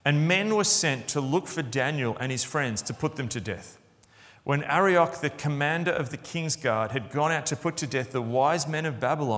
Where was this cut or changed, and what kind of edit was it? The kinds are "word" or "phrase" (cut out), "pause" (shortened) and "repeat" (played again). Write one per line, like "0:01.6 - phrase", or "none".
none